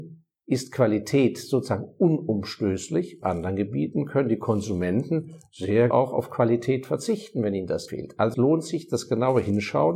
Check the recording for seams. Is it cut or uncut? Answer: cut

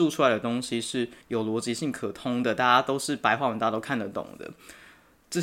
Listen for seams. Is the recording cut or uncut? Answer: cut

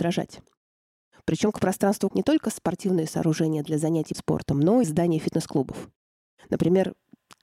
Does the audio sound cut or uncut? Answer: cut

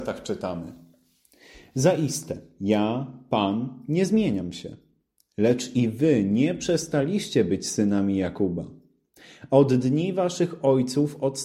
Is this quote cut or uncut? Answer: uncut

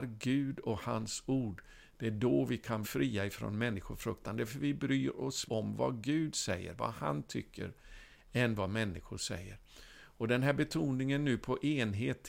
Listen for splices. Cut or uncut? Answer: cut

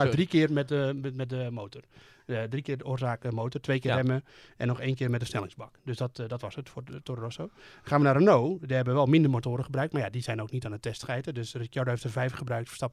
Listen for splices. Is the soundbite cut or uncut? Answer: uncut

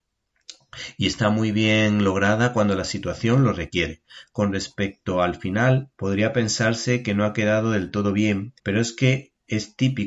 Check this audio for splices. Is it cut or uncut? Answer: cut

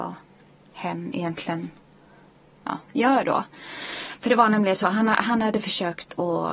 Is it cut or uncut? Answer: uncut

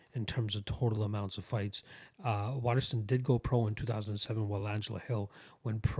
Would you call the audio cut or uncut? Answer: uncut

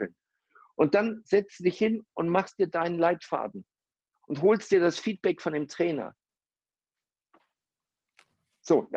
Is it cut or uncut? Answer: uncut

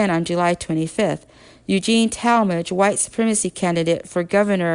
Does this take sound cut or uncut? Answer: uncut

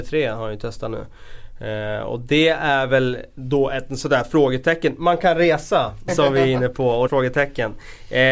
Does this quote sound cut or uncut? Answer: cut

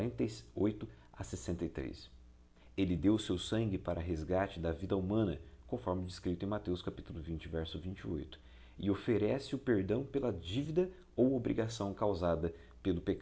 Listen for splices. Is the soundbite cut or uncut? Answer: uncut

